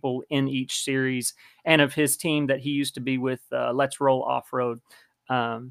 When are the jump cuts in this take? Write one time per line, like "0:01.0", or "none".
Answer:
none